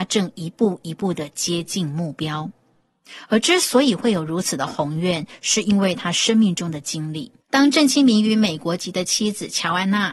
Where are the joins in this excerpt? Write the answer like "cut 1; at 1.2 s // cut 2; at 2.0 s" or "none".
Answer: cut 1; at 7.4 s